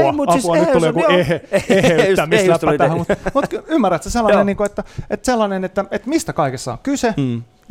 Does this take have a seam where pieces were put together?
no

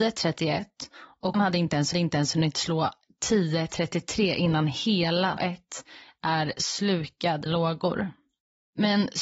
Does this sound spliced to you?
yes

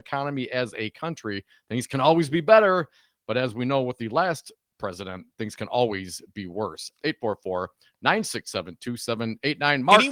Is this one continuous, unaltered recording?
yes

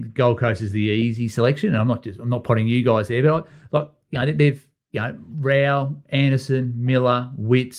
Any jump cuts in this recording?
no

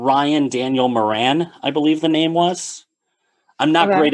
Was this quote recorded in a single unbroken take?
yes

